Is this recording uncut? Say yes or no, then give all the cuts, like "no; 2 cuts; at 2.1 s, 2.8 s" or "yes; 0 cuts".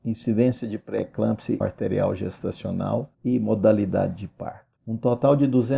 no; 3 cuts; at 1.6 s, 3.1 s, 4.8 s